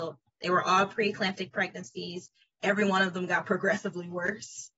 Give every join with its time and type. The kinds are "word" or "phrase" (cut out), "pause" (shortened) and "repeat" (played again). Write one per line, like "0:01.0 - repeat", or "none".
none